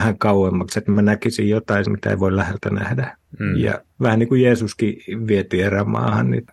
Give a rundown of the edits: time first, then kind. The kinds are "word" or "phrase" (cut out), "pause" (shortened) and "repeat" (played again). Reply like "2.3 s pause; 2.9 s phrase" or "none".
1.9 s word; 3.3 s pause